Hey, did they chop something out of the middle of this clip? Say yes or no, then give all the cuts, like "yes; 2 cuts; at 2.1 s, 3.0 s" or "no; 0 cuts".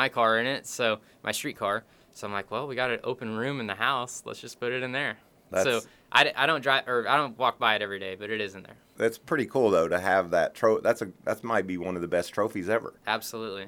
no; 0 cuts